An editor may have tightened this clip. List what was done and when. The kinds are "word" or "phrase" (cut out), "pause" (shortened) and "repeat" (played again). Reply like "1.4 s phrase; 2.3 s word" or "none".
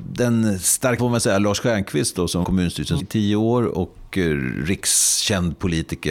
1.0 s word; 2.4 s word; 3.0 s word